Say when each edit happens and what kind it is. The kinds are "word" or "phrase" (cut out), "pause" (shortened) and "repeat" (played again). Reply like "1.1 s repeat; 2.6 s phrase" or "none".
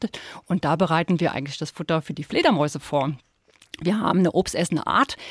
none